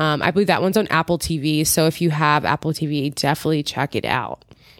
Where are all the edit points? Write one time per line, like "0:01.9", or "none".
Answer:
none